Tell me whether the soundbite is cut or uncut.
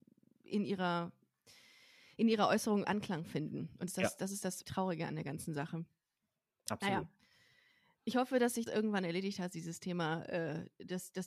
cut